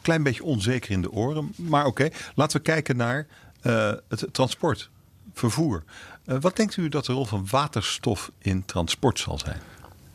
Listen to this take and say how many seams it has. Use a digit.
0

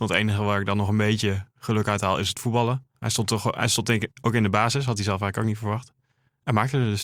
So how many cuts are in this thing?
1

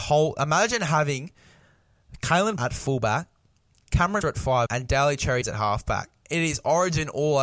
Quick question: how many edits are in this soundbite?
4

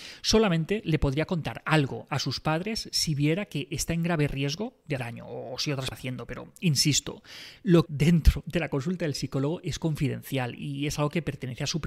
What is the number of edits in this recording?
3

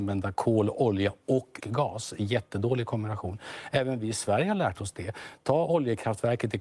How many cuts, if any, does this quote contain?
1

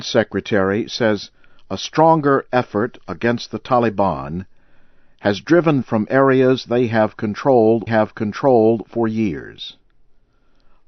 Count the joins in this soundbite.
2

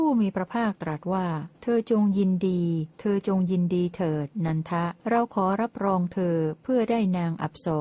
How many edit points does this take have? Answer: 3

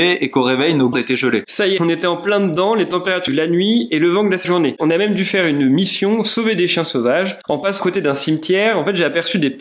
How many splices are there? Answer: 5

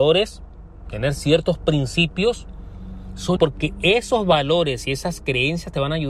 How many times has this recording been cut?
1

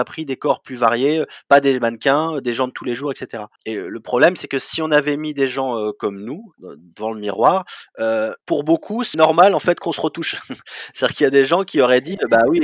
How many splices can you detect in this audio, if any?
4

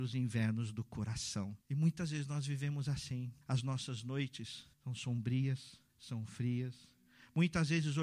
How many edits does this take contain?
4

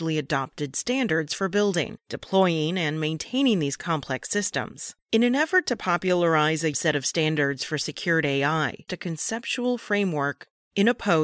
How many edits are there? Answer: 2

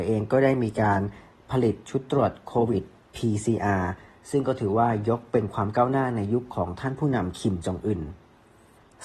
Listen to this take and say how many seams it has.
0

